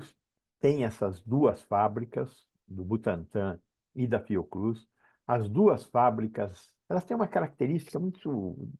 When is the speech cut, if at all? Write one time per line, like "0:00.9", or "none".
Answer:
0:06.8